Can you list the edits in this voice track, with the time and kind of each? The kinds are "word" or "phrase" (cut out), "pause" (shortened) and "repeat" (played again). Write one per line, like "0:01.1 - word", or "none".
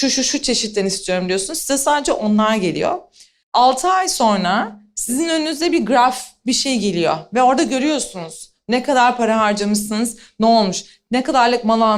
none

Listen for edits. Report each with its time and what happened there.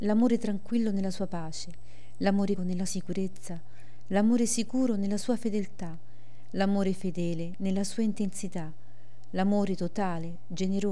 0:02.6 - word
0:02.9 - word

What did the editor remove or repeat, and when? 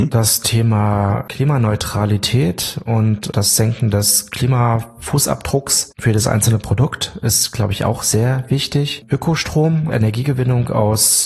0:09.9 - word

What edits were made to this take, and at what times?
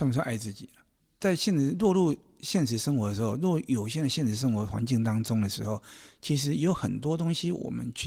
none

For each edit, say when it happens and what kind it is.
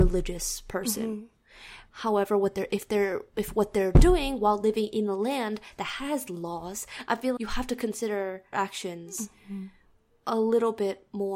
0:01.9 - pause
0:07.1 - phrase
0:07.4 - word
0:08.5 - word

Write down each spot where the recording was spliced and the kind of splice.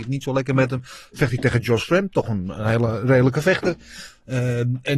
none

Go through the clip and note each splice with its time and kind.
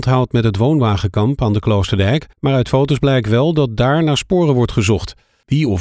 0:02.3 - pause

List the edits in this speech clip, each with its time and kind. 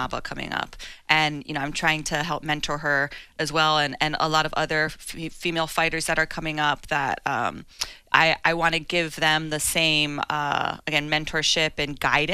none

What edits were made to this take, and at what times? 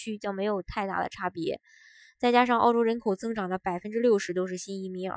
none

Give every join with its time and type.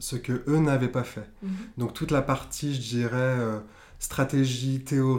none

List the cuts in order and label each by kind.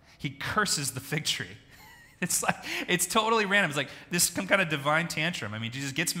none

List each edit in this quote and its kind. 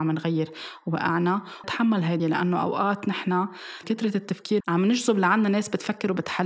0:01.6 - word
0:02.2 - word
0:03.8 - word
0:04.6 - word

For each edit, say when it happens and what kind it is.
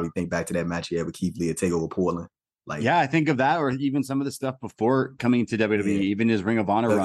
none

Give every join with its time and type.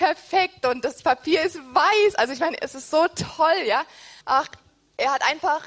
0:04.2 - pause

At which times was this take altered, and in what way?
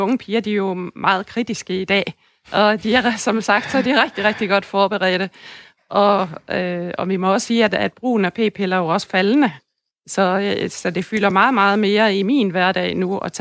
none

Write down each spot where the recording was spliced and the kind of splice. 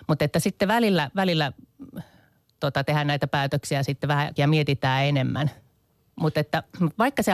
0:04.4 - word

